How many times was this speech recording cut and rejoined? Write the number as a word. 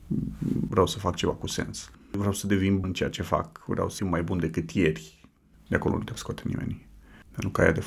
three